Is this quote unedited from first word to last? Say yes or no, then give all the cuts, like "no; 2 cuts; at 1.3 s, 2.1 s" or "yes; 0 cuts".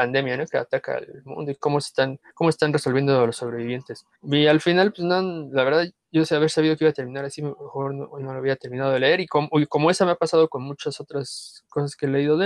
no; 2 cuts; at 2.3 s, 4.1 s